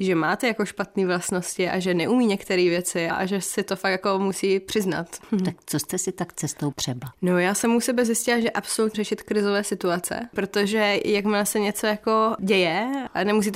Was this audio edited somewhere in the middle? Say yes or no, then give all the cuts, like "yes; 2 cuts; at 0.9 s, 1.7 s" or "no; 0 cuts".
yes; 3 cuts; at 3.1 s, 6.7 s, 8.9 s